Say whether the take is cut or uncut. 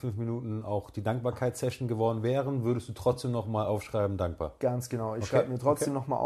uncut